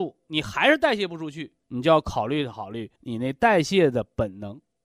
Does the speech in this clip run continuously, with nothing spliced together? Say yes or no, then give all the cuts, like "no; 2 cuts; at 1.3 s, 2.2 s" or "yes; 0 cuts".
no; 2 cuts; at 1.6 s, 3.0 s